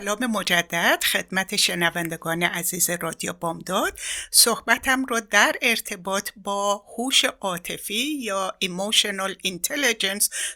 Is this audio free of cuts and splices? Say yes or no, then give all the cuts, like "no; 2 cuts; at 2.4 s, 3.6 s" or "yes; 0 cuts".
yes; 0 cuts